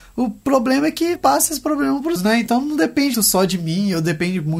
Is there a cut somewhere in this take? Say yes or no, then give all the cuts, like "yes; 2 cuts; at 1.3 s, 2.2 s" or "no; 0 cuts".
yes; 3 cuts; at 1.2 s, 2.2 s, 3.1 s